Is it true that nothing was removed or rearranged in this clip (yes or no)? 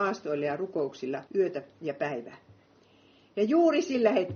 no